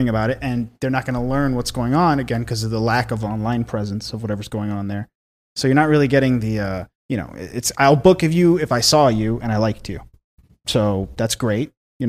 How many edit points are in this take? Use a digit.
1